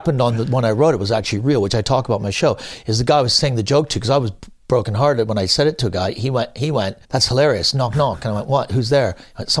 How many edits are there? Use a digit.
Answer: 1